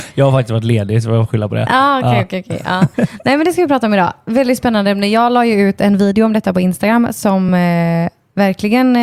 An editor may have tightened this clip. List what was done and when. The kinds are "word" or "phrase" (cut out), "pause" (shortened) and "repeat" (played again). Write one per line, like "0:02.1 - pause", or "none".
none